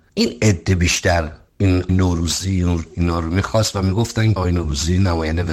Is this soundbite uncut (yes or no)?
no